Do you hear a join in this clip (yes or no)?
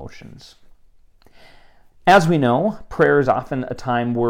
no